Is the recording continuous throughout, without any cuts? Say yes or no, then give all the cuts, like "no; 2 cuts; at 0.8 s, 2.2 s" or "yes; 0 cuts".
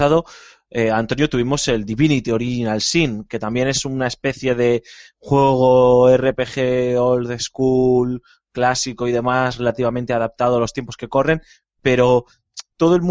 yes; 0 cuts